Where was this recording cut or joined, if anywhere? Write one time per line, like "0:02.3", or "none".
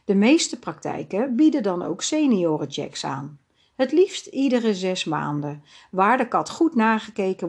none